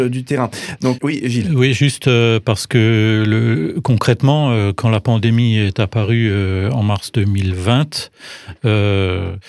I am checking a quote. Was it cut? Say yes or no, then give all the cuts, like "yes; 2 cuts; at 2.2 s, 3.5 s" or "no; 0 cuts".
yes; 1 cut; at 1.0 s